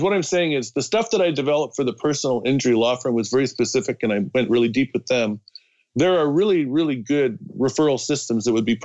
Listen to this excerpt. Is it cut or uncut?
uncut